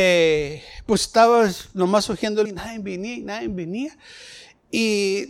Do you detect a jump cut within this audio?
yes; 1 cut; at 2.4 s

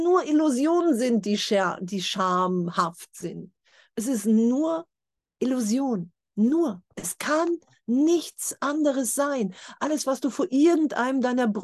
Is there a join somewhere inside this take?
no; 0 cuts

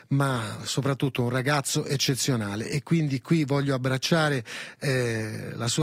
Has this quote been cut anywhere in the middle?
no; 0 cuts

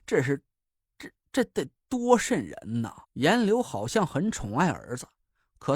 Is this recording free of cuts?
no; 2 cuts; at 1.8 s, 3.0 s

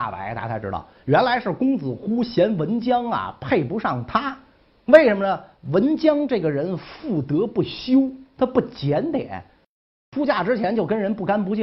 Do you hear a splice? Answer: no; 0 cuts

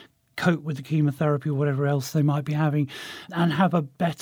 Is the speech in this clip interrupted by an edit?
no; 0 cuts

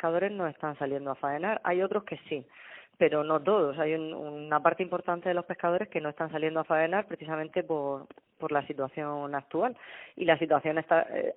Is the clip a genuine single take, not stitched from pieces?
yes; 0 cuts

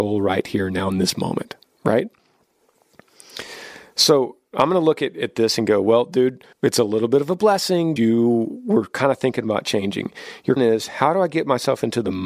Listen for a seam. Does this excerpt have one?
yes; 3 cuts; at 6.5 s, 8.0 s, 10.6 s

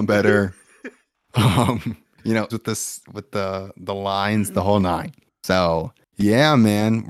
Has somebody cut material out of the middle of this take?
yes; 2 cuts; at 2.1 s, 2.5 s

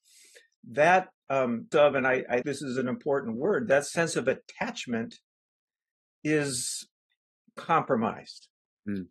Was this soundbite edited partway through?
yes; 2 cuts; at 1.7 s, 2.4 s

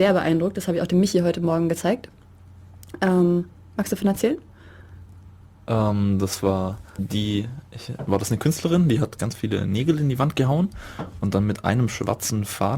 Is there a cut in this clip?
yes; 1 cut; at 7.0 s

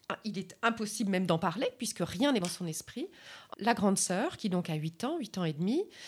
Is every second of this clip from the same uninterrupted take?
no; 2 cuts; at 2.4 s, 3.5 s

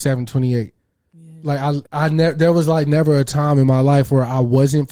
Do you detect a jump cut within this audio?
yes; 1 cut; at 1.9 s

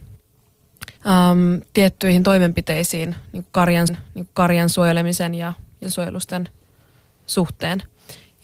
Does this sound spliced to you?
yes; 3 cuts; at 1.0 s, 3.9 s, 5.8 s

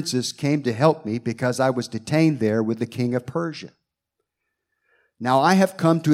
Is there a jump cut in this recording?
no; 0 cuts

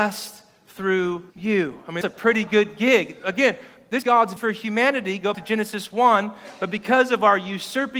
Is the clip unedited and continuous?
no; 5 cuts; at 1.3 s, 2.0 s, 4.0 s, 4.4 s, 5.3 s

